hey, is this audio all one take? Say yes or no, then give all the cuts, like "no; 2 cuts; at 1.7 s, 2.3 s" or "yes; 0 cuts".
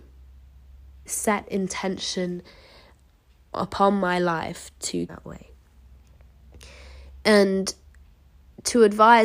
no; 2 cuts; at 1.1 s, 5.1 s